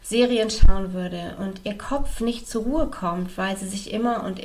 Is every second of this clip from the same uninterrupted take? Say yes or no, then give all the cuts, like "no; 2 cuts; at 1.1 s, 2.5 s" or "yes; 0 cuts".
yes; 0 cuts